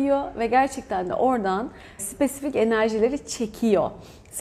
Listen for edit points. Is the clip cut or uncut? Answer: cut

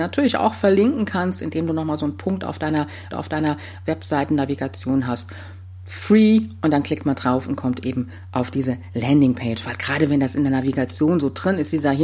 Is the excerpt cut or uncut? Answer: cut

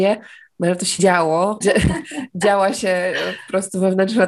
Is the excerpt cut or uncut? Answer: cut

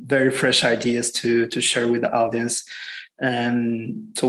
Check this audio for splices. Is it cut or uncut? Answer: uncut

